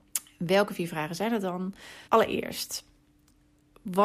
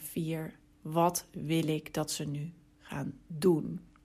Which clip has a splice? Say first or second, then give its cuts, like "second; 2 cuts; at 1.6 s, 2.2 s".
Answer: first; 1 cut; at 2.1 s